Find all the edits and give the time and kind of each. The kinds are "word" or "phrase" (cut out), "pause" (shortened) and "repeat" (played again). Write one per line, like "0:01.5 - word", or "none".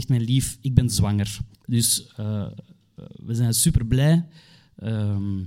0:01.5 - pause